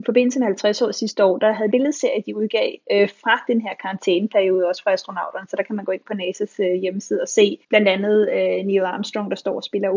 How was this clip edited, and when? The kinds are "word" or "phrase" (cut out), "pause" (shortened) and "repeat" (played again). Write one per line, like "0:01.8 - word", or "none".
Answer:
0:01.7 - phrase
0:07.6 - pause